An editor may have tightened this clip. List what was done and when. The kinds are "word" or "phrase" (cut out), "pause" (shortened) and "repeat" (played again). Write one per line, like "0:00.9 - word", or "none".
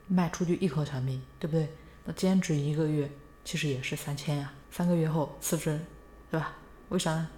0:04.6 - pause